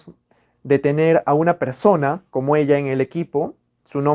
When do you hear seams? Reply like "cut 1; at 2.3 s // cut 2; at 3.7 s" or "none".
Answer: none